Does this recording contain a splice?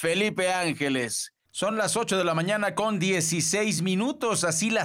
no; 0 cuts

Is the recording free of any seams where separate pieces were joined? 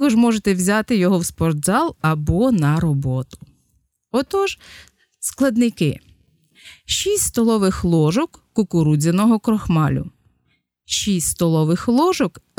yes; 0 cuts

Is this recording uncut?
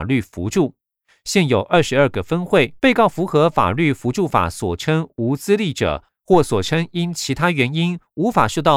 no; 1 cut; at 2.8 s

